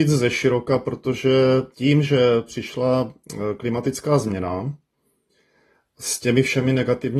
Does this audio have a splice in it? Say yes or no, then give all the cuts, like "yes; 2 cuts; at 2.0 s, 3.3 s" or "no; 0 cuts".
no; 0 cuts